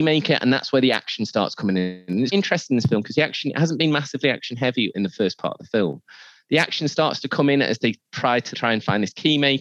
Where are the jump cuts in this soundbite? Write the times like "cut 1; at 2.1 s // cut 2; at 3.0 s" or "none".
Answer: cut 1; at 2.3 s // cut 2; at 4.9 s // cut 3; at 8.5 s